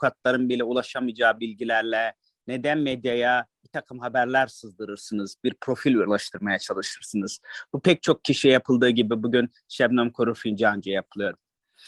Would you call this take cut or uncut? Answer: uncut